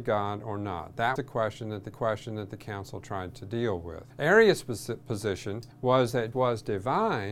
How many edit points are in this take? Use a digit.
5